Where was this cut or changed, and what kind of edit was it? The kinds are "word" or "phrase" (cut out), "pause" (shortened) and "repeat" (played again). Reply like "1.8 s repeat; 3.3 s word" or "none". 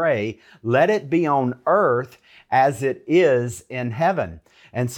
none